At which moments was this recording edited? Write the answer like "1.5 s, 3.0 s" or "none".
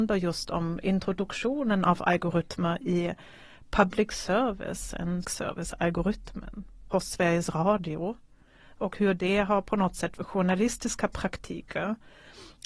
5.2 s, 6.9 s, 10.2 s